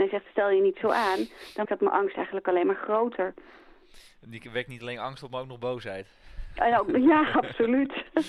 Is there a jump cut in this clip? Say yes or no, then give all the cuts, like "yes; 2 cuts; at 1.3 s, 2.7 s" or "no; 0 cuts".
yes; 1 cut; at 1.6 s